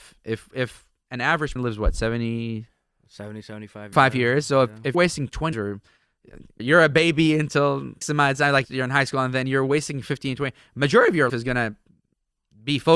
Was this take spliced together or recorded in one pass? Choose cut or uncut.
cut